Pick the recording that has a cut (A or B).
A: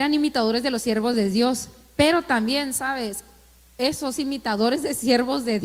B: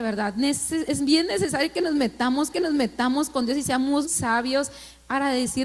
B